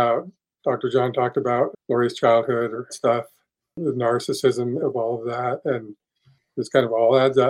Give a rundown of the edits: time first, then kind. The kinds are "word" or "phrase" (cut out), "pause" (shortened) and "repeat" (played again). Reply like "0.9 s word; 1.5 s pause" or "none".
1.7 s word; 2.9 s phrase; 4.8 s word